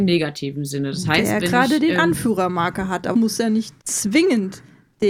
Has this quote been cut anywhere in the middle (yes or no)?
yes